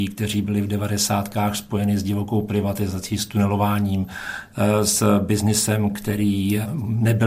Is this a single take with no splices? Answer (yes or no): yes